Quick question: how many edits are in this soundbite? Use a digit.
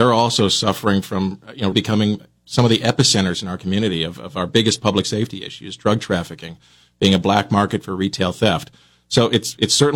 1